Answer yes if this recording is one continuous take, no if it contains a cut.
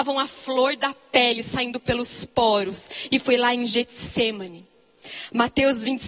yes